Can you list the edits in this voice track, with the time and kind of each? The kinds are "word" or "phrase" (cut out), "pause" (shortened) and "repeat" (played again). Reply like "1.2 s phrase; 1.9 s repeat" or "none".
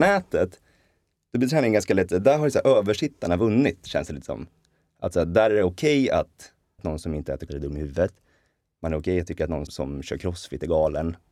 6.8 s word; 7.5 s word; 9.7 s word